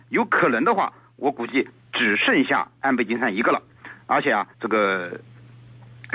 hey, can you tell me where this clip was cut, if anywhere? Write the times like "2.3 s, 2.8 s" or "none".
4.5 s